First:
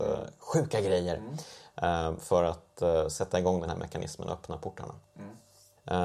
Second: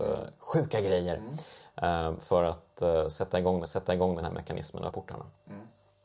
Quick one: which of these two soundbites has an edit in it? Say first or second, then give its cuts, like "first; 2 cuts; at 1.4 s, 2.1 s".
second; 2 cuts; at 3.7 s, 4.9 s